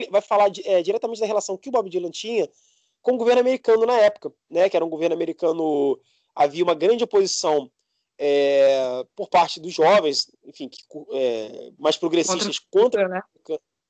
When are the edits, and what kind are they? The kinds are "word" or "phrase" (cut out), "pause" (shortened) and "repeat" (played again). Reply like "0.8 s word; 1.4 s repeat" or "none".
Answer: none